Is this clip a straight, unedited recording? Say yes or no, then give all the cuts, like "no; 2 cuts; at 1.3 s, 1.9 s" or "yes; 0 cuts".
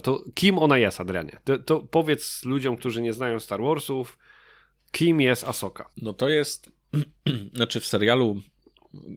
no; 1 cut; at 5.9 s